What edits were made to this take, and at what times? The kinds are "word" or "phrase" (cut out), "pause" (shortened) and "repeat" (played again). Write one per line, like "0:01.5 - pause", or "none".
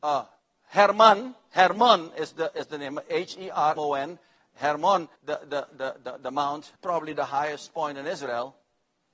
0:03.8 - word
0:05.2 - pause
0:06.8 - pause